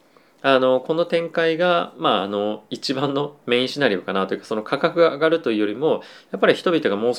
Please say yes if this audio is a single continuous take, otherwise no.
no